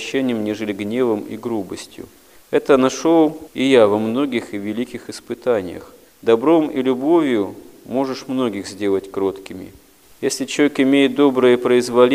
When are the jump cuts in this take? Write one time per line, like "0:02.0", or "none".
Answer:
none

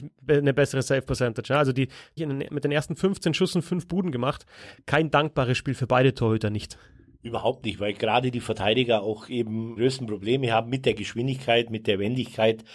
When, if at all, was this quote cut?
0:02.2
0:09.8

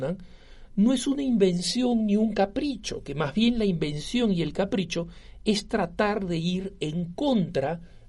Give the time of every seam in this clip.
none

